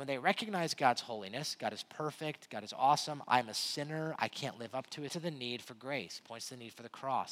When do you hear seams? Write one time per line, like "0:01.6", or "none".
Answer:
0:05.1